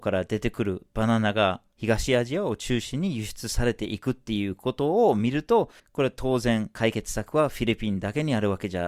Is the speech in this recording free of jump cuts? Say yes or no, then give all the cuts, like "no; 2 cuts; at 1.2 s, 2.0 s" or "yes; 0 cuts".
no; 1 cut; at 5.8 s